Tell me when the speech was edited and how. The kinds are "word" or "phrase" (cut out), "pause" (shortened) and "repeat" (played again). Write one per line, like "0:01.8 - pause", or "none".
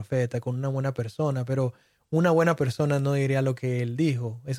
none